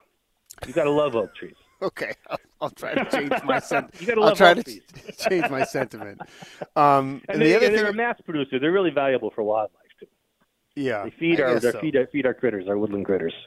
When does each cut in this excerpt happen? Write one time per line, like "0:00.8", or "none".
none